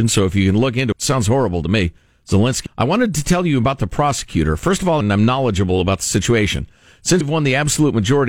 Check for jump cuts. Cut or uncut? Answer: cut